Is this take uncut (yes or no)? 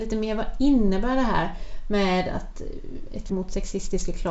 no